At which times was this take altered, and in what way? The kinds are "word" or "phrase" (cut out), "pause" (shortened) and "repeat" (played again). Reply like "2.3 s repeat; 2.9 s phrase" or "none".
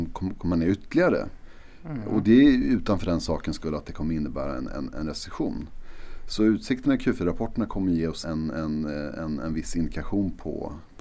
8.2 s word